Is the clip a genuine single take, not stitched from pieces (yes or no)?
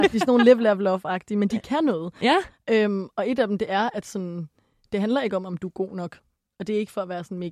yes